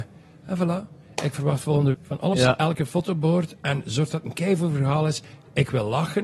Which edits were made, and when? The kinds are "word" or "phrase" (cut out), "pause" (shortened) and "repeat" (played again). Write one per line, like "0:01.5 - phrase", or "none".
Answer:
0:01.9 - word
0:02.3 - word